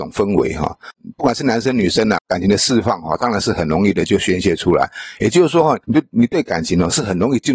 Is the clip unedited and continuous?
no; 1 cut; at 5.8 s

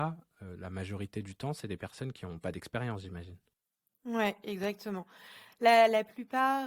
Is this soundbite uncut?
yes; 0 cuts

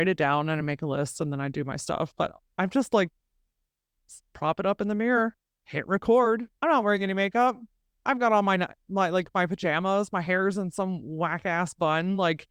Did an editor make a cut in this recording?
no; 0 cuts

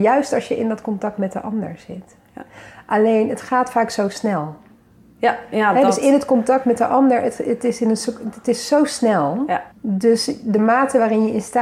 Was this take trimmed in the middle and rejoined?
yes; 1 cut; at 9.7 s

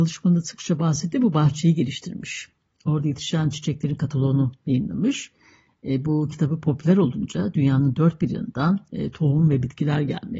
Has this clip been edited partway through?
no; 0 cuts

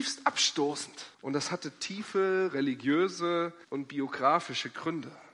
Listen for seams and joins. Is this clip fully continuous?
no; 2 cuts; at 1.1 s, 3.6 s

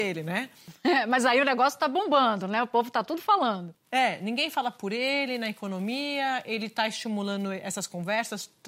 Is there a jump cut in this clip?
no; 0 cuts

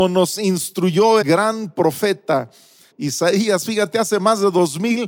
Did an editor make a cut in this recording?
yes; 2 cuts; at 1.2 s, 2.9 s

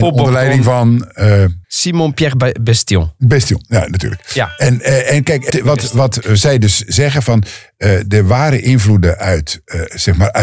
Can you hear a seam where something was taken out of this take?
yes; 3 cuts; at 1.6 s, 5.5 s, 6.2 s

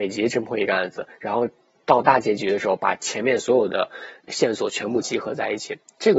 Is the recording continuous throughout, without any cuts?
no; 1 cut; at 4.3 s

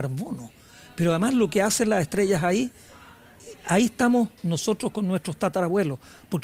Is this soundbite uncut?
no; 1 cut; at 4.4 s

